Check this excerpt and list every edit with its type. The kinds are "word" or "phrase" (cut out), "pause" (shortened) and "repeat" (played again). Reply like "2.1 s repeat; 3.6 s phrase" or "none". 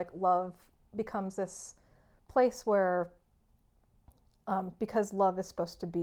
none